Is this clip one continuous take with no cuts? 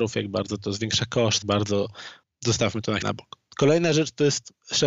no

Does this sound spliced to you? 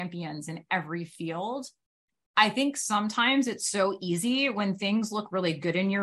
no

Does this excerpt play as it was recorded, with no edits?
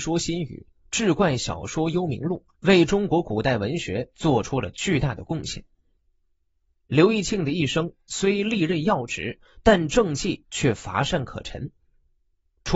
no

